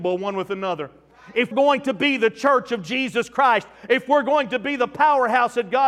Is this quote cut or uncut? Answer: cut